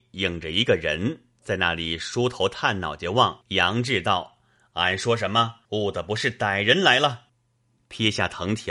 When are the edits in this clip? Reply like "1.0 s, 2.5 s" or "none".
3.4 s, 5.6 s, 7.3 s

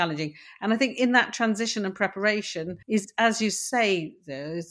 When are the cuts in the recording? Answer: 2.8 s

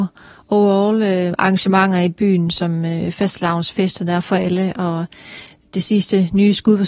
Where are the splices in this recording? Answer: none

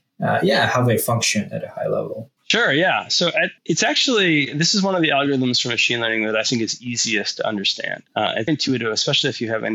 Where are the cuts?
2.4 s, 3.6 s, 8.1 s, 8.5 s

